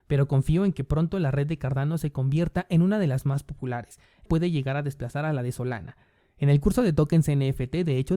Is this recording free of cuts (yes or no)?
no